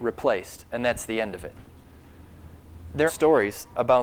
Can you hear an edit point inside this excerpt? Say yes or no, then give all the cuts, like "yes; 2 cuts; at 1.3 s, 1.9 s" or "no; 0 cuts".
yes; 1 cut; at 3.1 s